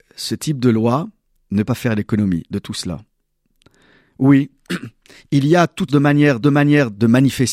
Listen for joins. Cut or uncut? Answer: cut